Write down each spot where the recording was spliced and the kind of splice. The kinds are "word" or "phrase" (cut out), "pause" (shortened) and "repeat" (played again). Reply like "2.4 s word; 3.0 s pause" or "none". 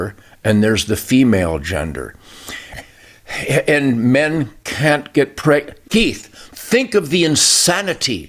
5.8 s pause